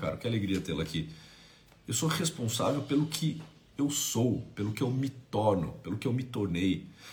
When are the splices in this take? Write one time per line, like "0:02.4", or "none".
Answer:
none